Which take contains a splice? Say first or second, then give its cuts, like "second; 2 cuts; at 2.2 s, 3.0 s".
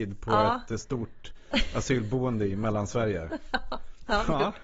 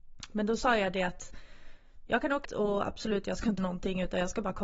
second; 2 cuts; at 2.4 s, 3.6 s